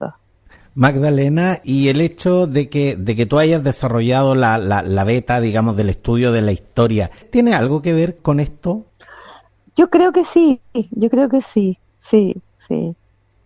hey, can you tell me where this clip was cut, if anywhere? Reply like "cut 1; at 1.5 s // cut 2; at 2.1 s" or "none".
none